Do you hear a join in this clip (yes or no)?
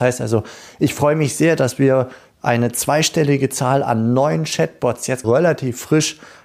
yes